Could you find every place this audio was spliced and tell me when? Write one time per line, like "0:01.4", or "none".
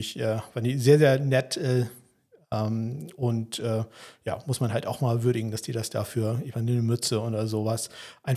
none